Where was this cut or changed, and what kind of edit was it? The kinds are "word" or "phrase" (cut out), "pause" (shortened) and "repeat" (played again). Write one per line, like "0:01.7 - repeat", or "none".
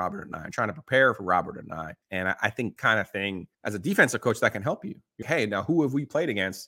0:02.0 - pause
0:02.8 - phrase
0:03.5 - pause
0:05.2 - word